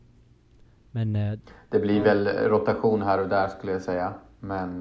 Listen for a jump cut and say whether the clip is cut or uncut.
uncut